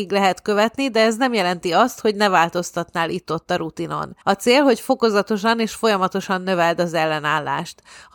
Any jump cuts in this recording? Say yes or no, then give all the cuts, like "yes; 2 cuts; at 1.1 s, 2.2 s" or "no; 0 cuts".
yes; 1 cut; at 4.2 s